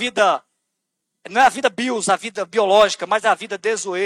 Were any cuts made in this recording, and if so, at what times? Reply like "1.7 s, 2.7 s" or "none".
none

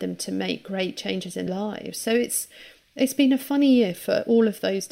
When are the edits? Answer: 1.5 s

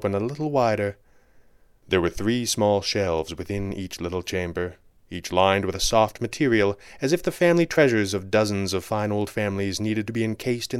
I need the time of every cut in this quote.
none

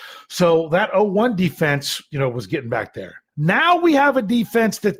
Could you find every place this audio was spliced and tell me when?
3.3 s

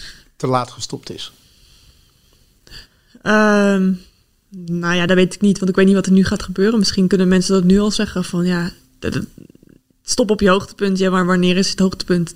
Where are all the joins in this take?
none

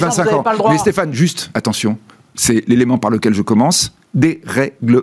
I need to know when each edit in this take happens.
1.5 s

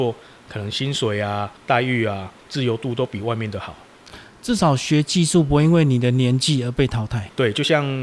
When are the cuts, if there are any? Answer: 1.6 s

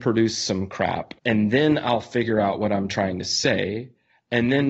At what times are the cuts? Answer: 1.2 s

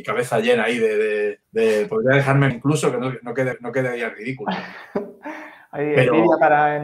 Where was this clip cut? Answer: 1.4 s, 2.5 s, 3.5 s

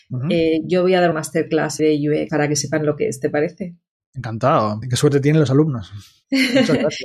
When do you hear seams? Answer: 1.1 s, 1.8 s, 2.3 s, 4.8 s

